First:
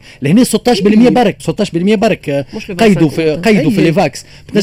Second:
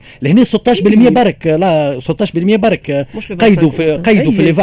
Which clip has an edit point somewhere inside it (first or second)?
first